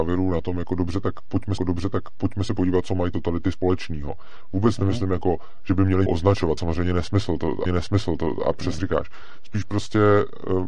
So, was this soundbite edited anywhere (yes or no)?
yes